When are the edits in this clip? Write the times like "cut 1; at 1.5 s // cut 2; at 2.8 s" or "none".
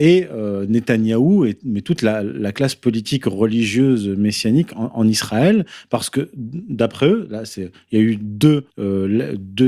cut 1; at 8.7 s